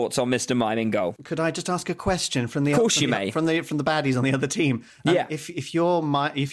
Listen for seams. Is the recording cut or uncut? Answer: uncut